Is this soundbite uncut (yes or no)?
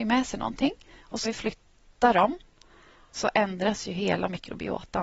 no